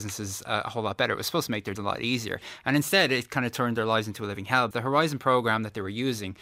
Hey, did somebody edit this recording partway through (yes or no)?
yes